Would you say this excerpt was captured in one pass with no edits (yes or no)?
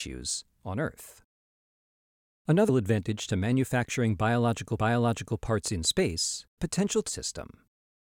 no